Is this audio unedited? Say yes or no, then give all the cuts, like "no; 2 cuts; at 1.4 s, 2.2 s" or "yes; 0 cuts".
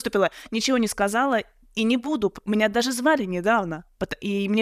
yes; 0 cuts